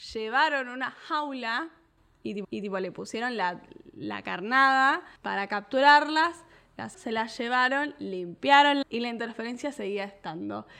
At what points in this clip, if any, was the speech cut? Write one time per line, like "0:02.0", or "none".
0:02.4
0:05.2
0:06.9
0:08.8